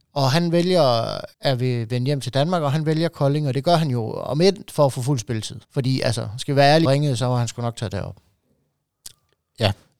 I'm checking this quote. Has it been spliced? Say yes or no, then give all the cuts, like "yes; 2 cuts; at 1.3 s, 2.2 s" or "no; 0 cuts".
yes; 3 cuts; at 1.3 s, 5.6 s, 6.8 s